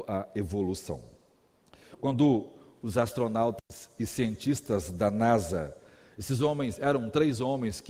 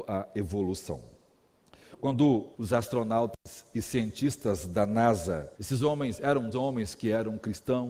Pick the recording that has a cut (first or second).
second